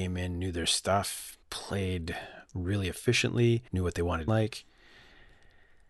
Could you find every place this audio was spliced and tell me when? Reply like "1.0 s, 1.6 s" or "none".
1.4 s, 3.7 s, 4.3 s